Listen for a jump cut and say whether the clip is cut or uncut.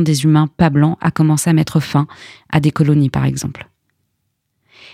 uncut